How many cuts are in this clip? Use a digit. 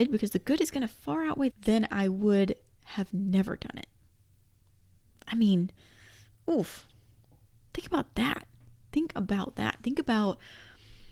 1